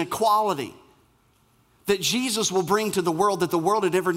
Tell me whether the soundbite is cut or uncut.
uncut